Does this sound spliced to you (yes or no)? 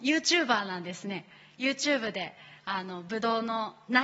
no